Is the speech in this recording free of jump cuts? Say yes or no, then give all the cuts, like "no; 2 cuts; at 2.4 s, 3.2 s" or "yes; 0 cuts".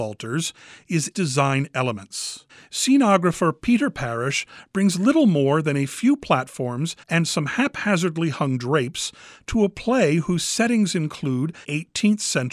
no; 4 cuts; at 1.1 s, 2.5 s, 7.0 s, 11.6 s